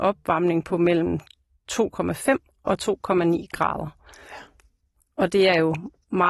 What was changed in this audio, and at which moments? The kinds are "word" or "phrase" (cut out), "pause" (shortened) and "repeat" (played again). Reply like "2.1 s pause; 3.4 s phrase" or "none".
none